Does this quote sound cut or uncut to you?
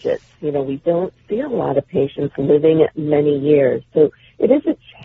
uncut